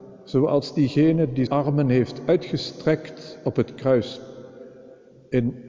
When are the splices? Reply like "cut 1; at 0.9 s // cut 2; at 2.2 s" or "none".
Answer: cut 1; at 1.5 s

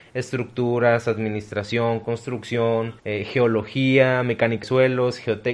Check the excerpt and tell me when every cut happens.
cut 1; at 3.0 s // cut 2; at 4.6 s

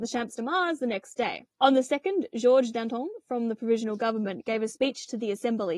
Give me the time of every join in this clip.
cut 1; at 1.5 s

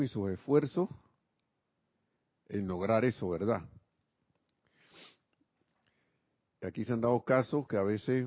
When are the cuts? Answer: none

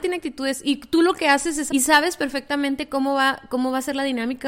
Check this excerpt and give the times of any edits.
cut 1; at 1.7 s

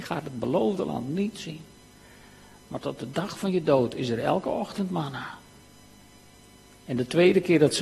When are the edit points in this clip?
none

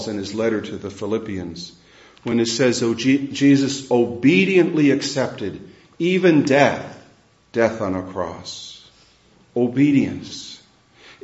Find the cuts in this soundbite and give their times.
none

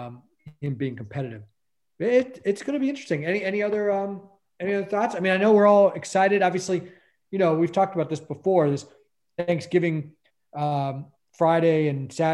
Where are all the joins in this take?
none

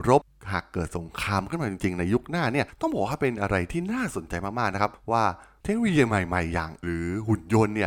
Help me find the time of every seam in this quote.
cut 1; at 6.8 s

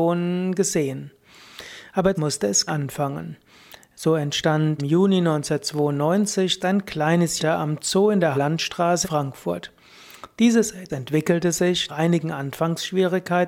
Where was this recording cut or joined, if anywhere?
cut 1; at 2.1 s // cut 2; at 2.7 s // cut 3; at 4.8 s // cut 4; at 6.6 s // cut 5; at 7.4 s // cut 6; at 8.3 s // cut 7; at 9.0 s // cut 8; at 10.9 s // cut 9; at 11.9 s

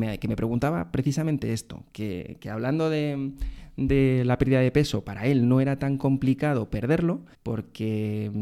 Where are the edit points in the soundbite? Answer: cut 1; at 7.3 s

